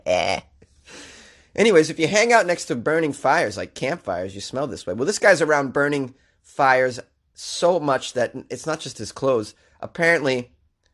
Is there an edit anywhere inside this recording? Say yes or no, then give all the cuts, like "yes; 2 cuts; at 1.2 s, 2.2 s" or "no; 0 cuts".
no; 0 cuts